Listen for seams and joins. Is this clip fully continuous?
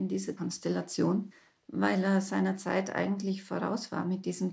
yes; 0 cuts

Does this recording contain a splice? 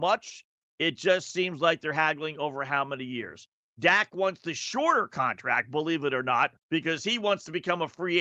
yes; 1 cut; at 6.6 s

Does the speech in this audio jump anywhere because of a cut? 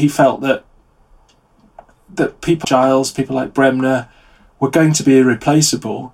yes; 1 cut; at 2.6 s

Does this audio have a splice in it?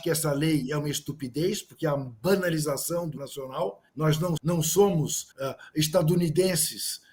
yes; 4 cuts; at 3.2 s, 3.9 s, 4.4 s, 5.3 s

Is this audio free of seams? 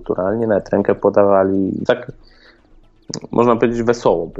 no; 1 cut; at 1.9 s

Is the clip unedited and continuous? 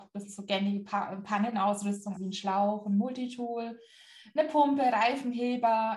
no; 1 cut; at 2.1 s

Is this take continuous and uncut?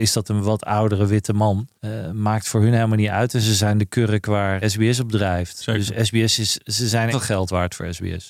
no; 3 cuts; at 1.8 s, 4.6 s, 7.1 s

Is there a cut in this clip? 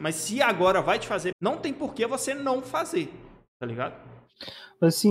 yes; 1 cut; at 1.3 s

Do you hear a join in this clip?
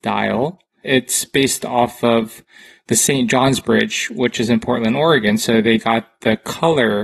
no; 0 cuts

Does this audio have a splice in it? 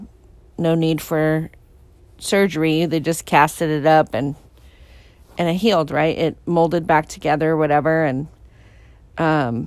no; 0 cuts

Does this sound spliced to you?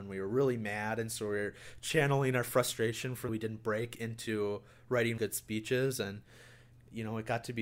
yes; 2 cuts; at 3.3 s, 5.2 s

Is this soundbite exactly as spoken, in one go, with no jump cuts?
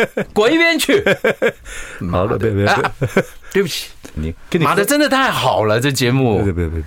no; 1 cut; at 4.2 s

